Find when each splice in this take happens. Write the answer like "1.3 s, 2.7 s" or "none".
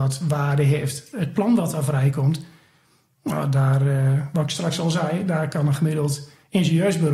none

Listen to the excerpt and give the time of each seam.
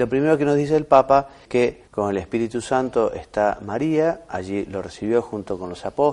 1.4 s, 1.9 s

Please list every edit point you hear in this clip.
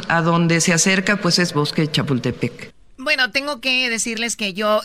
1.5 s

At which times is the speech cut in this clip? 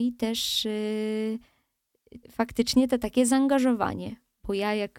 2.2 s

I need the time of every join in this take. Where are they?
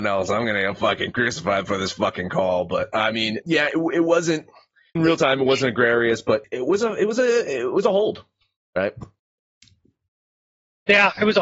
3.4 s, 5.0 s, 6.4 s

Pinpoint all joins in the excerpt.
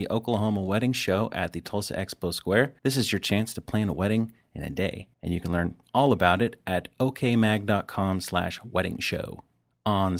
2.8 s, 5.1 s

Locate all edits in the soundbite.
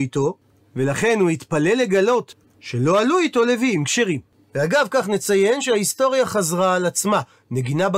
none

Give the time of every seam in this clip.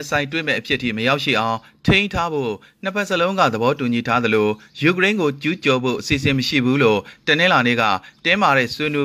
none

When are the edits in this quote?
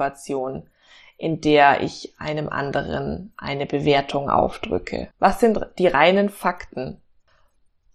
5.1 s

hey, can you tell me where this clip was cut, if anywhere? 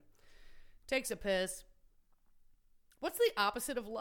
none

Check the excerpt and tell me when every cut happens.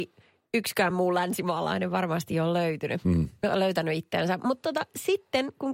none

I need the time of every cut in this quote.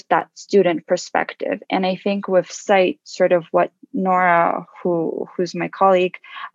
none

